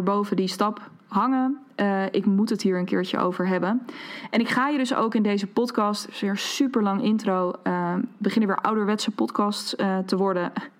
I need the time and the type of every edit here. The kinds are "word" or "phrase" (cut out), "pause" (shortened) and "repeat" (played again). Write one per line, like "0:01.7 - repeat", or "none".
none